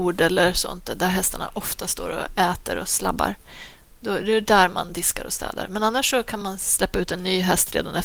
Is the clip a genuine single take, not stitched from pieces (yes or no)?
yes